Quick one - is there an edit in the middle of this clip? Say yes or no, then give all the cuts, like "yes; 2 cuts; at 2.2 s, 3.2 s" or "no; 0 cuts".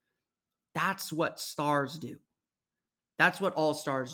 no; 0 cuts